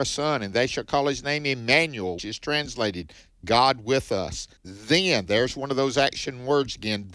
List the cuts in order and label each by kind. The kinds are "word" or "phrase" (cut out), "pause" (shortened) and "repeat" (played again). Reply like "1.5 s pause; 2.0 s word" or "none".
2.2 s word; 4.6 s pause